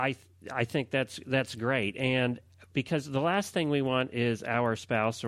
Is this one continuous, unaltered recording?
yes; 0 cuts

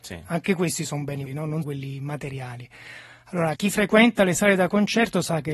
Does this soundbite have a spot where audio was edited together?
yes; 3 cuts; at 1.3 s, 1.6 s, 3.6 s

